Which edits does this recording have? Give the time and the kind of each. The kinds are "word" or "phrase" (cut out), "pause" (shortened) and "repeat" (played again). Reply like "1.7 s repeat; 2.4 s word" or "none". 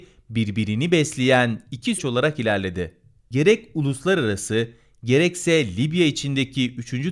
2.0 s word